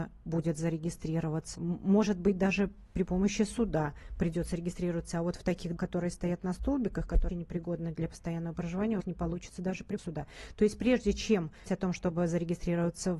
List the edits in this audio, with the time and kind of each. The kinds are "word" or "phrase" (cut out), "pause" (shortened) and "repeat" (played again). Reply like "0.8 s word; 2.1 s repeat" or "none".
1.5 s word; 5.8 s word; 7.3 s word; 9.0 s phrase; 9.6 s word; 10.0 s word; 11.7 s word